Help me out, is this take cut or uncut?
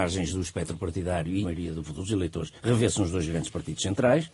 cut